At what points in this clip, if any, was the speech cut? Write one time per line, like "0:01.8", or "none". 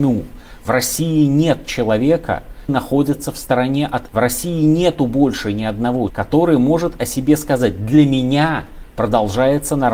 0:02.7
0:04.1
0:06.1